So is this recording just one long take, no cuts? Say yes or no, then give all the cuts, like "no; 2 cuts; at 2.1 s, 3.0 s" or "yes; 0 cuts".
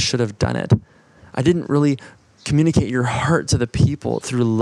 yes; 0 cuts